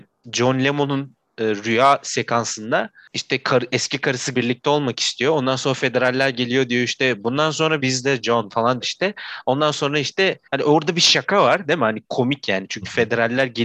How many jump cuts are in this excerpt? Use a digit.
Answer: 4